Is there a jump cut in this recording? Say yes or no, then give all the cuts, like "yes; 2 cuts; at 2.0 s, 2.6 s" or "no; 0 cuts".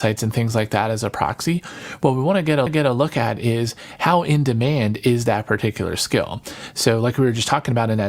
yes; 1 cut; at 2.7 s